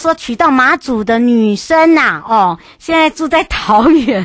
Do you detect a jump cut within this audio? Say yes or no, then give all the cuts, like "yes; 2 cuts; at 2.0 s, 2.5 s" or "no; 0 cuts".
no; 0 cuts